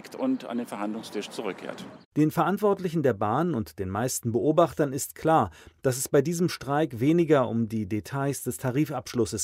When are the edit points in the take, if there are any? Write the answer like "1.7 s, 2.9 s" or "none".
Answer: none